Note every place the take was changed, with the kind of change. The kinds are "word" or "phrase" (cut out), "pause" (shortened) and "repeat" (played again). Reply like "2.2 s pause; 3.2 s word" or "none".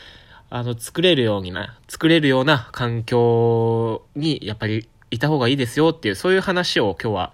4.1 s pause; 4.9 s pause